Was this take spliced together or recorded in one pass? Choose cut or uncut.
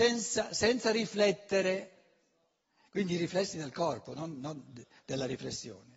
uncut